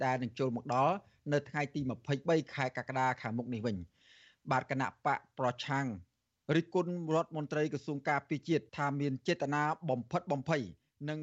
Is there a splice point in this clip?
yes; 1 cut; at 8.7 s

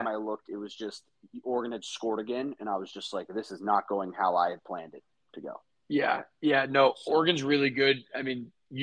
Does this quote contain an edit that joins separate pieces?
no; 0 cuts

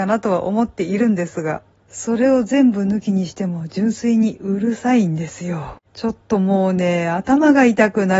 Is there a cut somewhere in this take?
yes; 2 cuts; at 1.7 s, 5.9 s

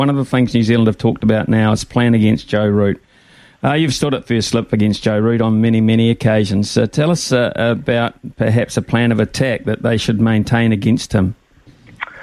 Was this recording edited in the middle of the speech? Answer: no; 0 cuts

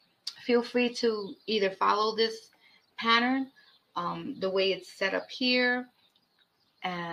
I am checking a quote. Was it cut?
no; 0 cuts

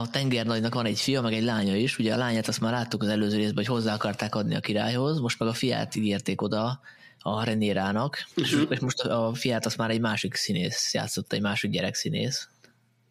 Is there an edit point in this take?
yes; 2 cuts; at 7.0 s, 8.3 s

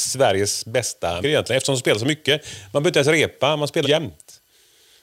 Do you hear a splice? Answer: yes; 2 cuts; at 1.2 s, 3.8 s

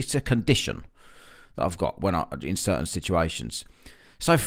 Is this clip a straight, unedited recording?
yes; 0 cuts

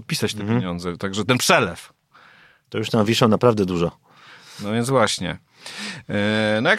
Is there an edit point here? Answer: no; 0 cuts

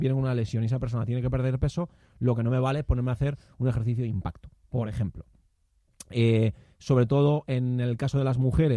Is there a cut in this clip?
no; 0 cuts

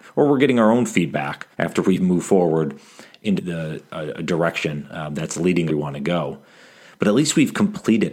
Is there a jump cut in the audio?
yes; 3 cuts; at 1.5 s, 3.4 s, 5.7 s

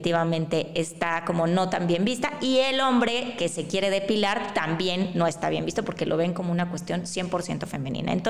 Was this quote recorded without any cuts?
yes; 0 cuts

